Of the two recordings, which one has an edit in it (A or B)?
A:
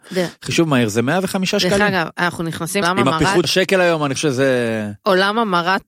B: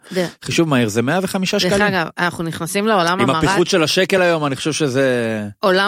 A